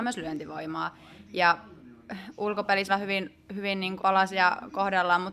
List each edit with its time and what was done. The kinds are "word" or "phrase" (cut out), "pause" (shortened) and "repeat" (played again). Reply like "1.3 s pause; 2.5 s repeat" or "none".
2.9 s word; 4.0 s word